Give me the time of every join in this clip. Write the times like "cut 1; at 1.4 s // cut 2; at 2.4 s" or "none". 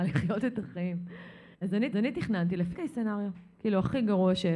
cut 1; at 1.5 s // cut 2; at 1.9 s // cut 3; at 2.7 s